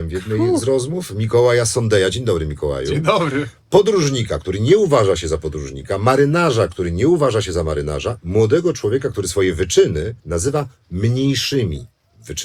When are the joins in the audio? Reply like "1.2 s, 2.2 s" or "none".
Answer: 10.2 s